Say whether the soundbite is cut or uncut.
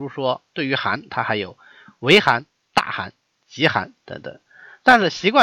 uncut